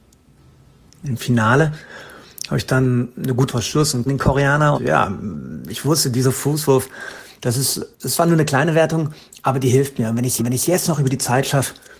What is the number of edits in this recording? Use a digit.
5